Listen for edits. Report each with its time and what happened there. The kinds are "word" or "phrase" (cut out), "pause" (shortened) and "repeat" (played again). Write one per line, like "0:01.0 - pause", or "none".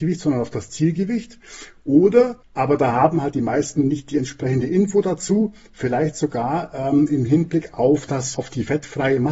0:02.4 - pause
0:08.3 - word